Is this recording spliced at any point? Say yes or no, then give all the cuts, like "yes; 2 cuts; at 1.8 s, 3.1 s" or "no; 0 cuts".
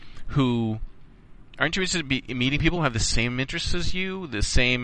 no; 0 cuts